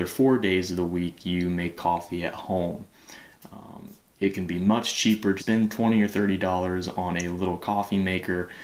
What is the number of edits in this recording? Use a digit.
1